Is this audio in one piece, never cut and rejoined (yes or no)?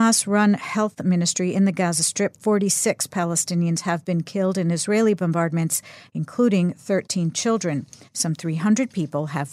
yes